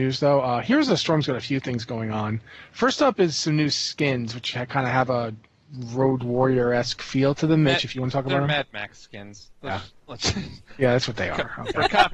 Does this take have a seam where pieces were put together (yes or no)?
no